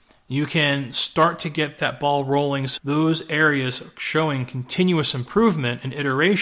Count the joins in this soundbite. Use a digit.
1